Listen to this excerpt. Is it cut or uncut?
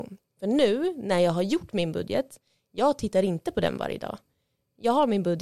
uncut